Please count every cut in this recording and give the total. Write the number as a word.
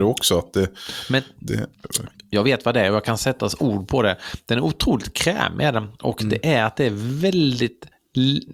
zero